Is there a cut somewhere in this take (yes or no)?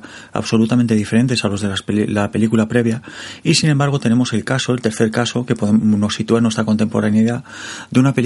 no